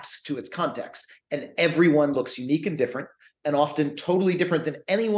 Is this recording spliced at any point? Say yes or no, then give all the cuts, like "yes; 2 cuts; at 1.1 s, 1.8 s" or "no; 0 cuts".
no; 0 cuts